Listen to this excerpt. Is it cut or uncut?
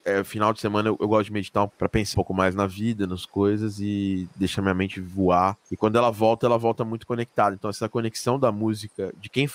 cut